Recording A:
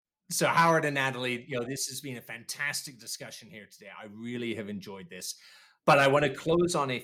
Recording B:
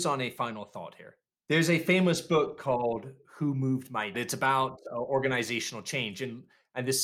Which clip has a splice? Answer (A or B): B